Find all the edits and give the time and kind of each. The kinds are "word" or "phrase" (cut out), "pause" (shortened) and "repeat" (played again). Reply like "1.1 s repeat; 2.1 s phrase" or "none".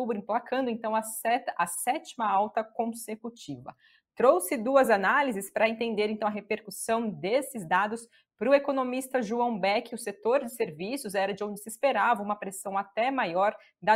none

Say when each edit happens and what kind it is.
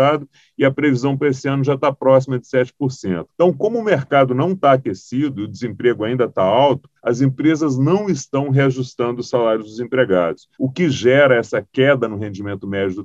3.3 s pause; 7.0 s pause; 10.5 s pause

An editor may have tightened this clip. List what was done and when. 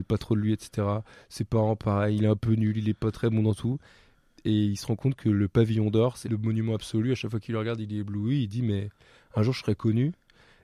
6.2 s word

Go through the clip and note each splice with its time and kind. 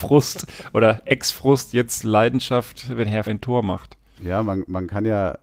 3.2 s word

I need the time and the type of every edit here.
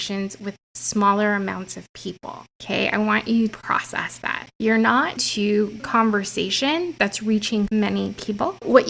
2.5 s pause; 3.5 s word; 5.2 s word; 5.8 s phrase; 7.7 s word

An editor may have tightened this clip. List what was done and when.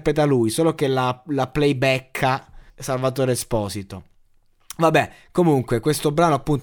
2.7 s pause

